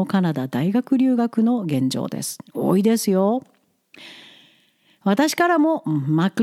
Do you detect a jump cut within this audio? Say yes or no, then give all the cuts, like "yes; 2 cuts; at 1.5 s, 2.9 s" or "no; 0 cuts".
no; 0 cuts